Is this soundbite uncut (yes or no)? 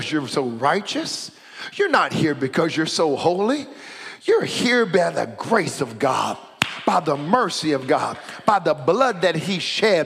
yes